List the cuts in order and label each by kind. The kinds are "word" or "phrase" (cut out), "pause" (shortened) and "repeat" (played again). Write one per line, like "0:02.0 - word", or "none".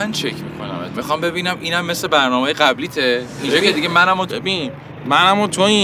0:00.9 - word
0:04.3 - word